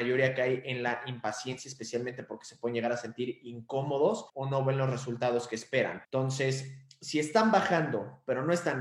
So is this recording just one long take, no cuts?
no; 2 cuts; at 4.3 s, 6.0 s

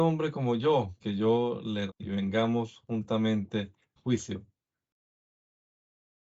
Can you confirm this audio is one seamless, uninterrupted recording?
no; 3 cuts; at 1.0 s, 1.9 s, 4.0 s

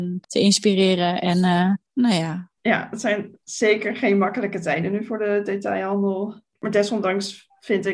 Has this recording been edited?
yes; 1 cut; at 2.6 s

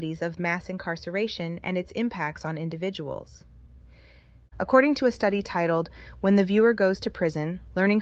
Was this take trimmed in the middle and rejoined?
no; 0 cuts

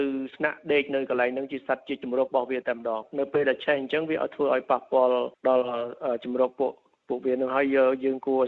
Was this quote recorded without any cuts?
yes; 0 cuts

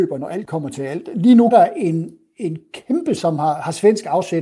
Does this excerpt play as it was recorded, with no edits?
no; 2 cuts; at 1.5 s, 3.2 s

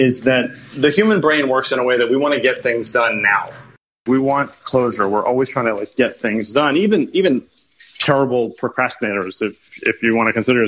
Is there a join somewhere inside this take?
no; 0 cuts

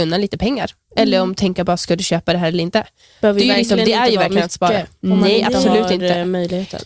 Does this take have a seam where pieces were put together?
no; 0 cuts

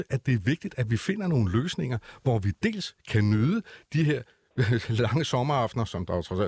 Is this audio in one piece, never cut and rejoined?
yes; 0 cuts

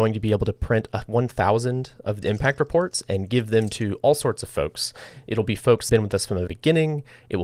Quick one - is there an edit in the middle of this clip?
yes; 3 cuts; at 2.2 s, 5.9 s, 6.5 s

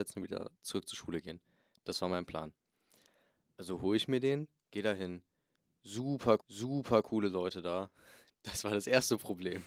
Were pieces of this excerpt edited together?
yes; 1 cut; at 6.4 s

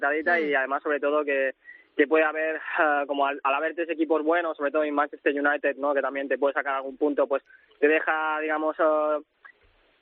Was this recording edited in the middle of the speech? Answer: no; 0 cuts

